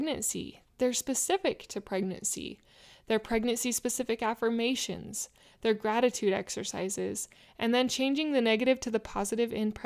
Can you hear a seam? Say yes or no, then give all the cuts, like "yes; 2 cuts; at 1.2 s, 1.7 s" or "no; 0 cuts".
no; 0 cuts